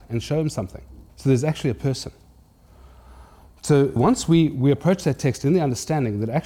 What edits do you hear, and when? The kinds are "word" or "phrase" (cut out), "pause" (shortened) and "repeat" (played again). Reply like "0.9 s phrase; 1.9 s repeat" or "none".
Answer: 1.1 s pause; 4.0 s word